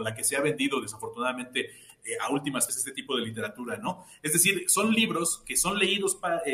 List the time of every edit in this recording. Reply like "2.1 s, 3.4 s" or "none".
2.7 s